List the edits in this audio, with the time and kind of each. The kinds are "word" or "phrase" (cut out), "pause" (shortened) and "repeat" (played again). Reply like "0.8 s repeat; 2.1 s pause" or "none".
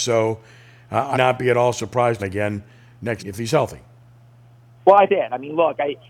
1.1 s word; 2.2 s phrase; 3.2 s word; 5.1 s phrase